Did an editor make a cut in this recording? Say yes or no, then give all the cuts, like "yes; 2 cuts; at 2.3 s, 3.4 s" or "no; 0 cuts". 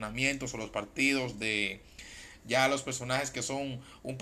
no; 0 cuts